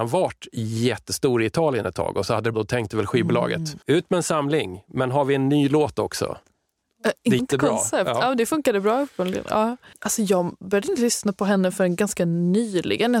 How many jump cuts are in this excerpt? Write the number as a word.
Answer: four